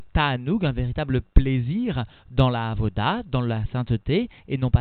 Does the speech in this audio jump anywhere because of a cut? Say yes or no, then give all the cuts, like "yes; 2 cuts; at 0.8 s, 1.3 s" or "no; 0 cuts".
no; 0 cuts